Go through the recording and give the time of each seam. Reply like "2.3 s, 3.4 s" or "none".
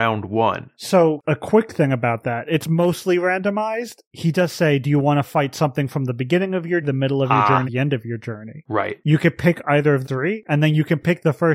1.2 s, 6.8 s, 7.7 s, 10.0 s